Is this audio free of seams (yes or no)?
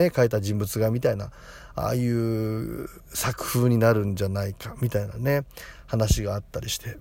no